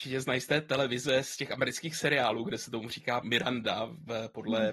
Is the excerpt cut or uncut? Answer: cut